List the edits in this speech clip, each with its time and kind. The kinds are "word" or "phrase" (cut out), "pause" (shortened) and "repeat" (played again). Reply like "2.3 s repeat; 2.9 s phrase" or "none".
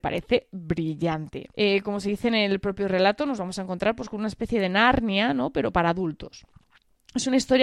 1.5 s pause